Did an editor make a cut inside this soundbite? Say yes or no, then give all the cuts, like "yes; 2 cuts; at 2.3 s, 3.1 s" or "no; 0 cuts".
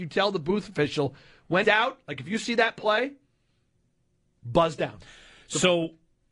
yes; 1 cut; at 1.6 s